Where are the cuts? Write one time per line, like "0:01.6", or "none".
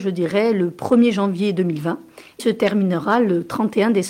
0:02.4